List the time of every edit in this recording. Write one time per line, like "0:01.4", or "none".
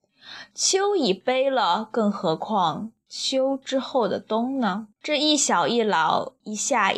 0:04.9